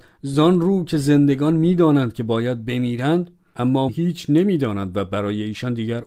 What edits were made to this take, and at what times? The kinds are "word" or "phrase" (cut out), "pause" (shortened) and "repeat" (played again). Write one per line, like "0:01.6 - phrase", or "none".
0:03.9 - word